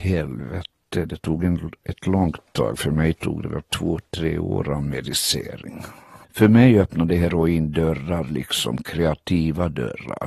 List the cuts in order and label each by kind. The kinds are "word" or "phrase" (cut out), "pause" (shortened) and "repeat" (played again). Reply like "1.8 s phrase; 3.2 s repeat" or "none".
6.2 s pause